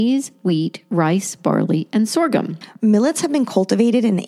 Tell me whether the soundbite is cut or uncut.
uncut